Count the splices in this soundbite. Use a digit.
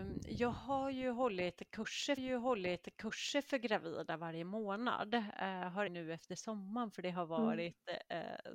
2